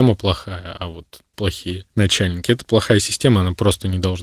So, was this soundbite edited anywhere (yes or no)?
yes